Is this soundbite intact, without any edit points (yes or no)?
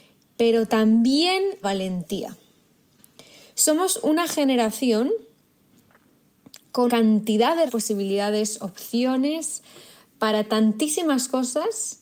no